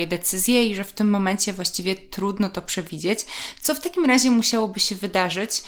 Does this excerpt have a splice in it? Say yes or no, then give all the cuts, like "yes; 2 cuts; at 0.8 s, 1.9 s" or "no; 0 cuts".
no; 0 cuts